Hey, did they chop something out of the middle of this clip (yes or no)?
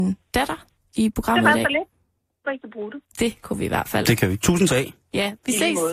yes